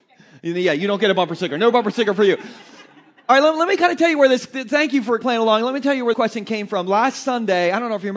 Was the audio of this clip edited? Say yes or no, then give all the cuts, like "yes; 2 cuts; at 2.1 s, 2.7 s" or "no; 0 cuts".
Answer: yes; 2 cuts; at 5.2 s, 6.1 s